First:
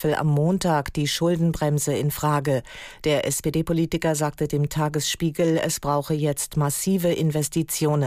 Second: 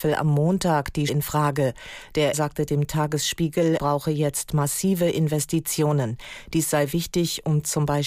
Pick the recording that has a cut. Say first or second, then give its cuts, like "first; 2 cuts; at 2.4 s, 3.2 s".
second; 3 cuts; at 1.1 s, 2.3 s, 3.8 s